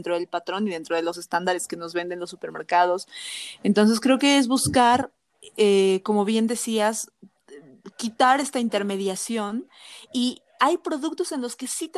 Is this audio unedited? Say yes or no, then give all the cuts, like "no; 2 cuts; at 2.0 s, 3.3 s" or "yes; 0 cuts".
yes; 0 cuts